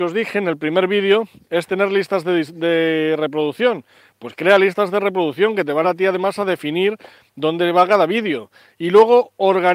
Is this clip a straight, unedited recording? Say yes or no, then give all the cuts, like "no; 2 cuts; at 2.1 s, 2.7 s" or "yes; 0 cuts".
no; 1 cut; at 5.8 s